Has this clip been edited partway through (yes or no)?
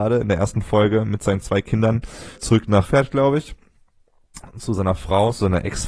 yes